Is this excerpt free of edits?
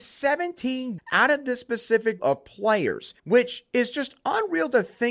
no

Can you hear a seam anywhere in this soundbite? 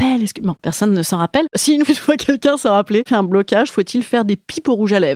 yes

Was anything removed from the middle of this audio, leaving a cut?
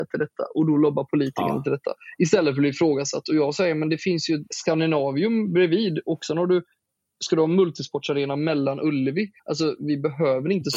yes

